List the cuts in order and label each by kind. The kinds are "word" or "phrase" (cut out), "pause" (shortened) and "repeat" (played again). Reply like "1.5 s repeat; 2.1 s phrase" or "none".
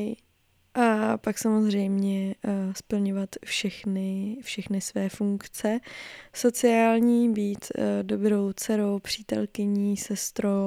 none